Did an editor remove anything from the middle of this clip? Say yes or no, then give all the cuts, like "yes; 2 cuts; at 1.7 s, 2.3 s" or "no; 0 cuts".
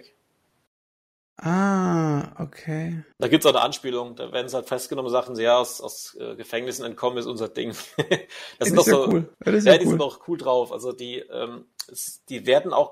yes; 2 cuts; at 3.1 s, 9.3 s